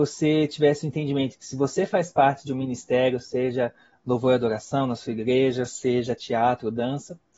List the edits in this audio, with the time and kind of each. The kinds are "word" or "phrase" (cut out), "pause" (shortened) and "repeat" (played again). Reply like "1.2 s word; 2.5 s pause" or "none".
none